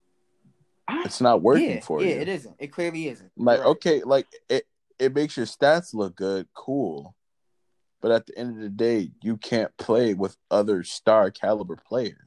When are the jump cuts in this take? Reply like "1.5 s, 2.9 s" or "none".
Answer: none